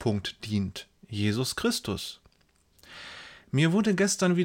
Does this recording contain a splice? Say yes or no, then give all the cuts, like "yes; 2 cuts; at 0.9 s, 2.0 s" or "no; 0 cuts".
yes; 1 cut; at 1.0 s